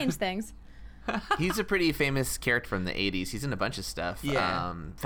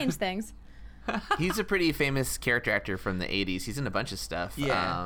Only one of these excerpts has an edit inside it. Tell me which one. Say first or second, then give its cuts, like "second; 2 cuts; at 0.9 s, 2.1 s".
first; 1 cut; at 2.6 s